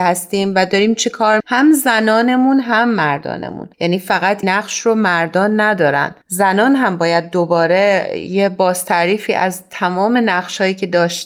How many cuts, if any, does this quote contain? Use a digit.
4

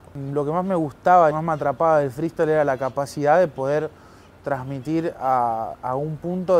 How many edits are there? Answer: 1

